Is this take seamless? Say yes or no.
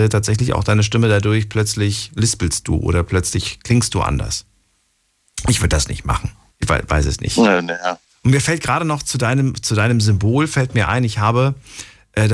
no